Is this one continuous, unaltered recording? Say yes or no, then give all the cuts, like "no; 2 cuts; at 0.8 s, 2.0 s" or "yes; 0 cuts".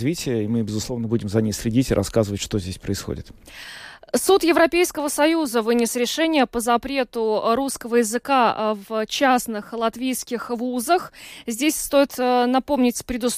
yes; 0 cuts